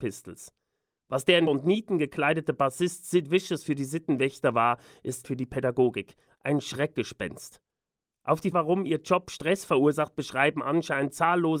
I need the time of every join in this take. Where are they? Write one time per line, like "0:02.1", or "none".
0:01.5
0:05.2
0:08.5